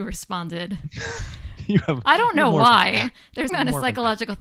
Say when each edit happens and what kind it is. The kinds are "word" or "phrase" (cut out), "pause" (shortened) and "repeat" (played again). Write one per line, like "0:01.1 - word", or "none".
0:03.5 - word